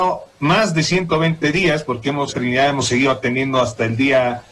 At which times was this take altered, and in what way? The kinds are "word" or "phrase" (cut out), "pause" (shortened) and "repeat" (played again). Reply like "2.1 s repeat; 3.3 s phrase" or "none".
2.3 s phrase